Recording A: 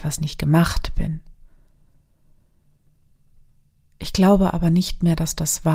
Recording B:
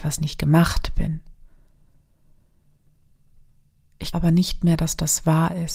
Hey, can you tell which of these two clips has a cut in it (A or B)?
B